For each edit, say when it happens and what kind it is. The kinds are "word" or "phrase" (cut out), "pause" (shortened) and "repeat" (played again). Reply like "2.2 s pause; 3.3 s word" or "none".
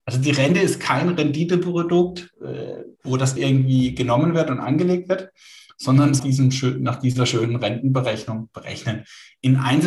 3.0 s pause; 3.4 s word; 6.2 s phrase